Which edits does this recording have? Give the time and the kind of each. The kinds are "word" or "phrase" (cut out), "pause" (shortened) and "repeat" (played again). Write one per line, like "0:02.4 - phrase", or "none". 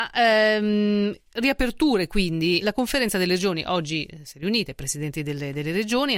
0:02.6 - word